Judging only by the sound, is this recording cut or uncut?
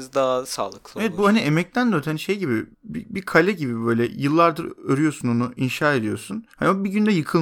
cut